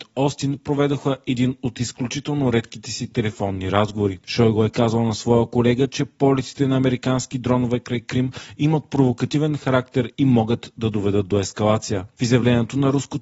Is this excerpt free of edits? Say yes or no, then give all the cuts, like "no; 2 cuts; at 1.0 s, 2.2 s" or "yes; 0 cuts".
yes; 0 cuts